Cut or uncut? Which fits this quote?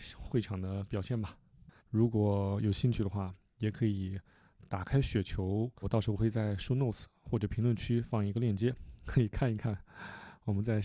cut